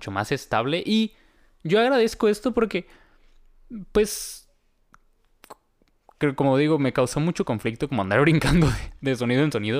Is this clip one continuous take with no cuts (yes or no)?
yes